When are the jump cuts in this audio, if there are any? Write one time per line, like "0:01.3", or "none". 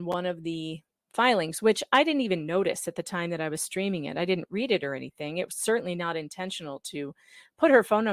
none